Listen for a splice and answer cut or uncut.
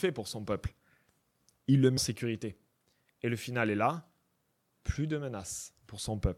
cut